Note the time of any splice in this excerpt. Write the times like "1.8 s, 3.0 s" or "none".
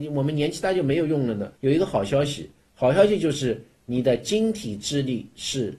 1.6 s